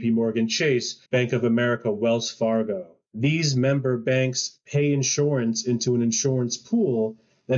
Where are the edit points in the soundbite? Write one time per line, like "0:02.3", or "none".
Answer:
0:01.1